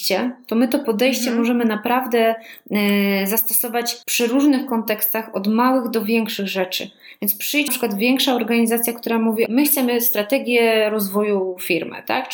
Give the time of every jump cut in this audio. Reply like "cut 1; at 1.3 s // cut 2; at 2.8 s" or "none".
cut 1; at 4.0 s // cut 2; at 7.7 s // cut 3; at 9.5 s